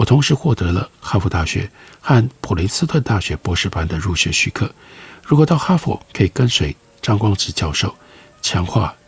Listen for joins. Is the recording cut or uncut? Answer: cut